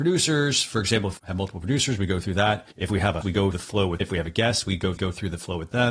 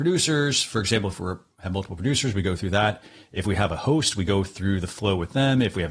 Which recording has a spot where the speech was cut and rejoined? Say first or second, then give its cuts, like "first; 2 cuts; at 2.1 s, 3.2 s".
first; 6 cuts; at 1.2 s, 2.7 s, 3.2 s, 3.5 s, 4.0 s, 5.0 s